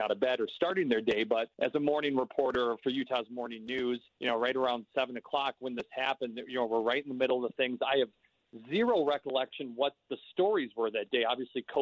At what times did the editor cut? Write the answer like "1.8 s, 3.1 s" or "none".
1.5 s, 4.1 s